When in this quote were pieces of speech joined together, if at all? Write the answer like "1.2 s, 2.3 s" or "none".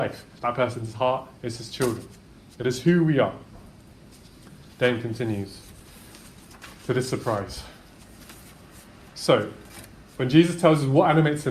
none